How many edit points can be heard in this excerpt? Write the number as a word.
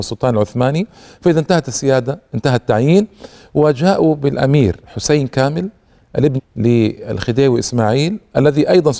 one